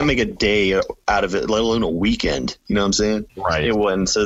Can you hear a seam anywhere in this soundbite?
no; 0 cuts

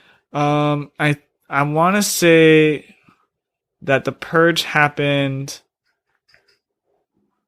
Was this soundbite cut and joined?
no; 0 cuts

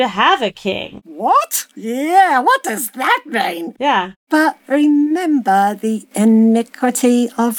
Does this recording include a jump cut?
no; 0 cuts

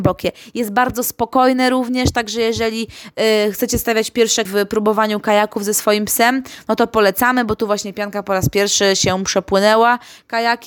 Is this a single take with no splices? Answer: no; 1 cut; at 4.5 s

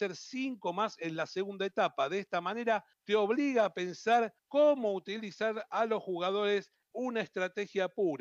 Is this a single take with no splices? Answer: no; 3 cuts; at 2.9 s, 4.4 s, 6.9 s

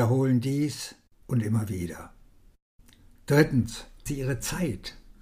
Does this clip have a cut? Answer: yes; 2 cuts; at 1.2 s, 4.1 s

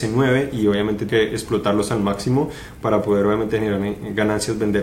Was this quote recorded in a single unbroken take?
no; 1 cut; at 1.1 s

